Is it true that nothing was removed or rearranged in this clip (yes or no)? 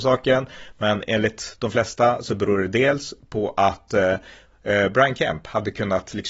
yes